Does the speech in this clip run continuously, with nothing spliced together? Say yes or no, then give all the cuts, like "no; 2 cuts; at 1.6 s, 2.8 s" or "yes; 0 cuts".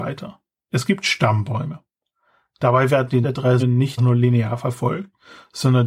no; 3 cuts; at 3.2 s, 3.6 s, 4.0 s